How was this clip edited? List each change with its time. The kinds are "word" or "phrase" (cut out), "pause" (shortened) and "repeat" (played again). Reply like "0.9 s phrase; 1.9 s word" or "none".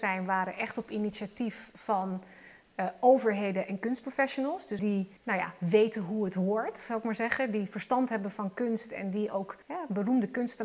4.8 s word; 5.2 s pause; 9.6 s pause